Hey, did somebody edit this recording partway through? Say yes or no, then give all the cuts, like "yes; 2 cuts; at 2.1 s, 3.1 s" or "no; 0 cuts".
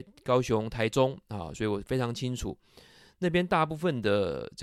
no; 0 cuts